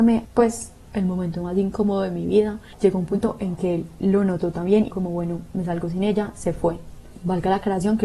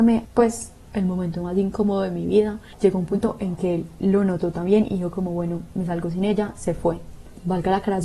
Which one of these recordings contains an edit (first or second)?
first